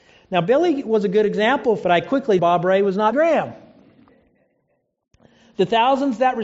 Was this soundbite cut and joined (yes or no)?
yes